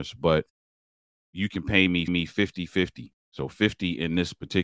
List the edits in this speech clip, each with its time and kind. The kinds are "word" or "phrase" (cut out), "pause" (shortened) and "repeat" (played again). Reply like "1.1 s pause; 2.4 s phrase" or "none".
2.1 s repeat